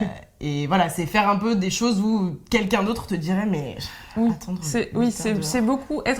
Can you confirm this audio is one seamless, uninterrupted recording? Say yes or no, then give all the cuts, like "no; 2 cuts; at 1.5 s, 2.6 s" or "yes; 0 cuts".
yes; 0 cuts